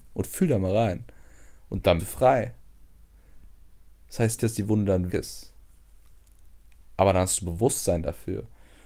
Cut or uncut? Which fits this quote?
cut